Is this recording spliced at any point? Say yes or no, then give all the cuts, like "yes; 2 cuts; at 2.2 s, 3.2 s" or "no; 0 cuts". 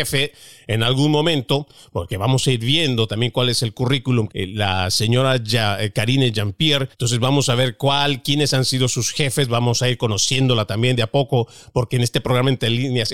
yes; 2 cuts; at 4.3 s, 6.9 s